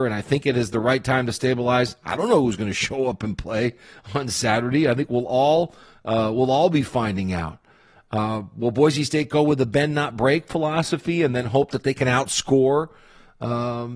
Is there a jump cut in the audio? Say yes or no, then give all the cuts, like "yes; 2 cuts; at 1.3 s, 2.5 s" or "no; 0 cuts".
no; 0 cuts